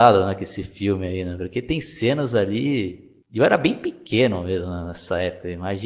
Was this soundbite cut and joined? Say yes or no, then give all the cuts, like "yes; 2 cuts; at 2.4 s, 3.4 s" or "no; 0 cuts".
yes; 1 cut; at 3.2 s